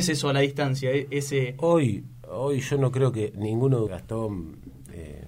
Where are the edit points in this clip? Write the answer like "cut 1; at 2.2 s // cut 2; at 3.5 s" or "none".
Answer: cut 1; at 3.9 s